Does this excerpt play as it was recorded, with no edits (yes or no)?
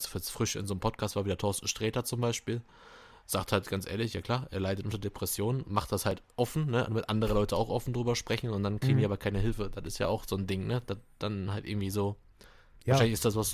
yes